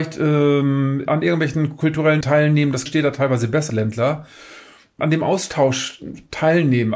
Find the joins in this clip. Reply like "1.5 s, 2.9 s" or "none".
1.1 s, 2.2 s, 2.9 s, 3.7 s